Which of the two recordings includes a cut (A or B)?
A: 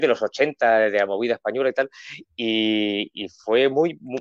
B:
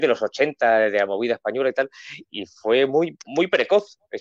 B